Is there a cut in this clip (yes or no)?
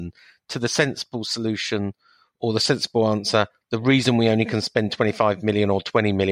no